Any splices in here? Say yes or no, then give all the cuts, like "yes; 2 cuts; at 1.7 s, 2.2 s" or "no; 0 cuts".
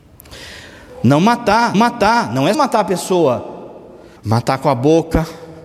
yes; 3 cuts; at 1.7 s, 2.5 s, 4.2 s